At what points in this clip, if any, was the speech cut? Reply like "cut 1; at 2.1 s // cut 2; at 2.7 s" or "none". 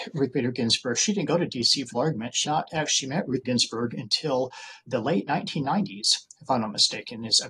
cut 1; at 1.9 s // cut 2; at 2.4 s // cut 3; at 3.4 s // cut 4; at 4.9 s